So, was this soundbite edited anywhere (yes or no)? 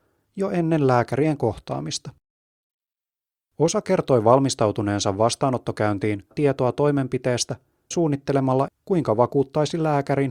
yes